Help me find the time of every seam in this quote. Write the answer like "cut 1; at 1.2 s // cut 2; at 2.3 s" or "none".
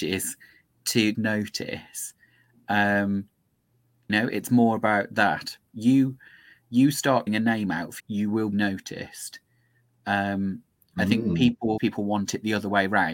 cut 1; at 1.1 s // cut 2; at 4.1 s // cut 3; at 7.3 s // cut 4; at 8.0 s // cut 5; at 8.5 s // cut 6; at 11.8 s

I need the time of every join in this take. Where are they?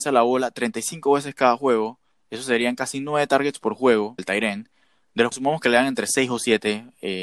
cut 1; at 4.2 s // cut 2; at 5.3 s

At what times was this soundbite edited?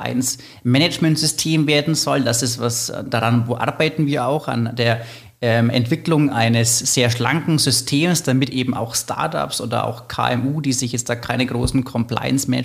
none

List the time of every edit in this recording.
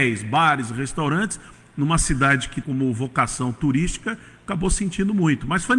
cut 1; at 2.6 s

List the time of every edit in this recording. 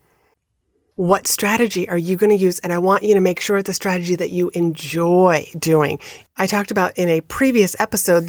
none

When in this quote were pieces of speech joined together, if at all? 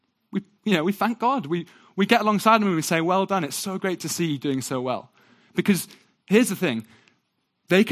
none

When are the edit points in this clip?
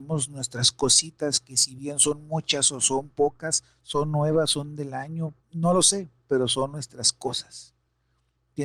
cut 1; at 5.4 s

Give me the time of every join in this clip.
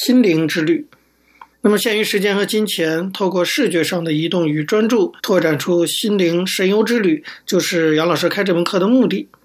cut 1; at 1.5 s // cut 2; at 5.2 s

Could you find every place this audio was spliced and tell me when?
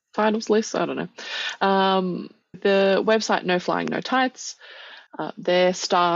cut 1; at 2.5 s // cut 2; at 5.1 s

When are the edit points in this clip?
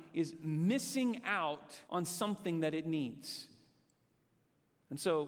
cut 1; at 1.9 s

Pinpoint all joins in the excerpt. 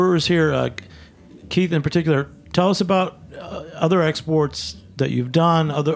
none

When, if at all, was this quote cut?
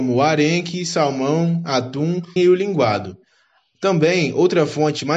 cut 1; at 2.4 s

